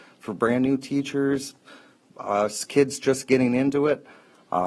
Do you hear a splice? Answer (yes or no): no